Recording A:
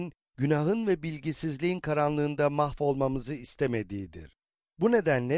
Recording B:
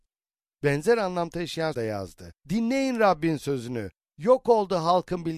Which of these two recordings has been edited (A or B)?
B